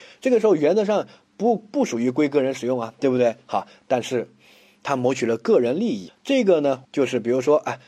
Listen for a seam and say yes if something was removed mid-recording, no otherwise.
yes